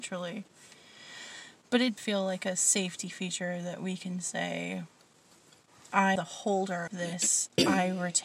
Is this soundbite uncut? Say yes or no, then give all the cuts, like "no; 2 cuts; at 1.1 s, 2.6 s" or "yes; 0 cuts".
no; 3 cuts; at 2.0 s, 6.2 s, 6.9 s